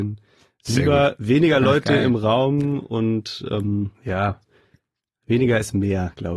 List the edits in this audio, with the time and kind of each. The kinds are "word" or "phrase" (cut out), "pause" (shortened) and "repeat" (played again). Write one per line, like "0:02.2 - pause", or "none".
0:03.9 - pause

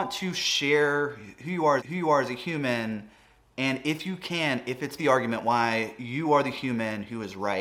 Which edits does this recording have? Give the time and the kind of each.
0:01.8 - repeat
0:05.0 - phrase

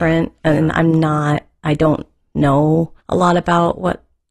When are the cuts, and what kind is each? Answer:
0:03.0 - pause

